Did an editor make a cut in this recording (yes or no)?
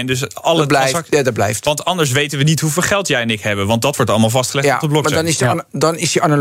no